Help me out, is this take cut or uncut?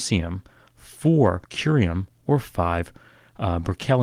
cut